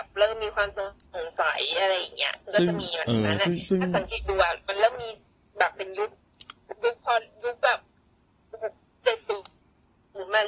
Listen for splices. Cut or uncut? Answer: uncut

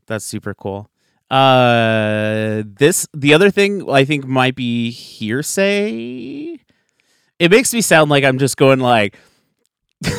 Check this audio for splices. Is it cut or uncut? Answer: uncut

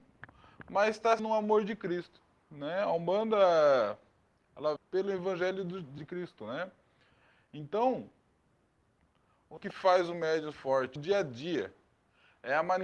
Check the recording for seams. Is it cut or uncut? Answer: cut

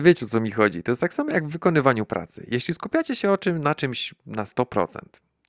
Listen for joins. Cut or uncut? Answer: uncut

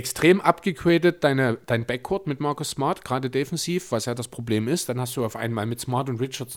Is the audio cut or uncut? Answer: uncut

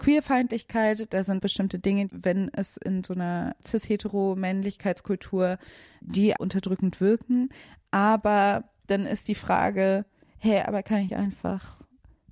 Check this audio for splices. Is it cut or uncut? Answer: cut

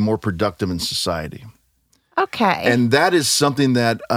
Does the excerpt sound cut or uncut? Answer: uncut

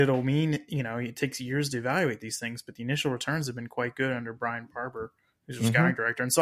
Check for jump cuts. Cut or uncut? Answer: uncut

